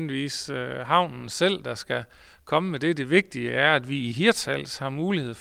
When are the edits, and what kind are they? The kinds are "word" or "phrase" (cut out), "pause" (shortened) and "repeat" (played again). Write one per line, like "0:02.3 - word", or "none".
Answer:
none